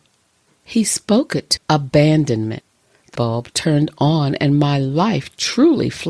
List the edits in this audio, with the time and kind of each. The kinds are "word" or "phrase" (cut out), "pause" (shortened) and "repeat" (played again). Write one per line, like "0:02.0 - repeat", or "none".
0:01.6 - word
0:03.1 - word

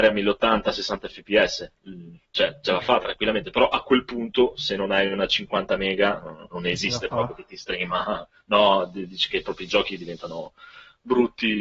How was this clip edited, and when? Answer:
none

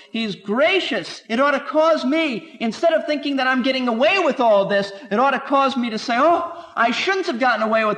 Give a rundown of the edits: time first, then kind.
0:01.2 - pause

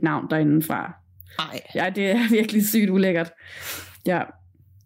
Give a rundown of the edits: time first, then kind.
none

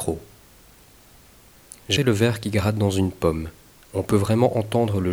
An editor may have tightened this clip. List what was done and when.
0:02.0 - word

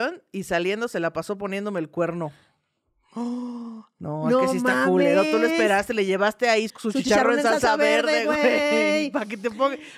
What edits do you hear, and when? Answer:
0:06.7 - word

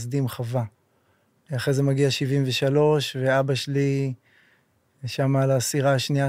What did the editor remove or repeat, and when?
none

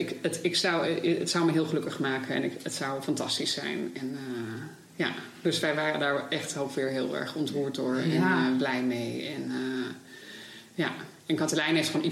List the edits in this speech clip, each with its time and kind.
0:11.2 - pause

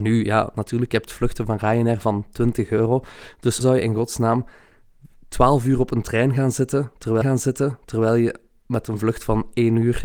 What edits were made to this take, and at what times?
0:03.6 - word
0:07.2 - repeat

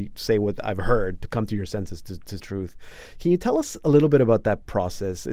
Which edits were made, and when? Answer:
0:02.4 - phrase

